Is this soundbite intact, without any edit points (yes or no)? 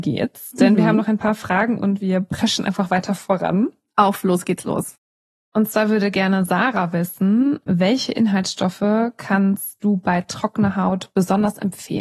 yes